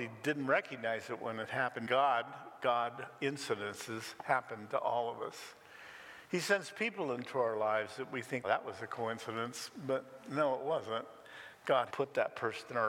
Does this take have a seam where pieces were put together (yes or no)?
yes